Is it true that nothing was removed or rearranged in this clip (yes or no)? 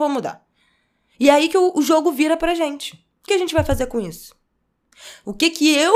no